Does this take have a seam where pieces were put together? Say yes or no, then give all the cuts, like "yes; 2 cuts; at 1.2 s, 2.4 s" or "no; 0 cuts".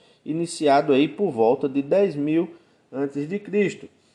no; 0 cuts